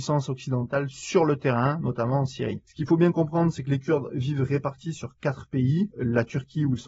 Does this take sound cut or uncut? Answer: cut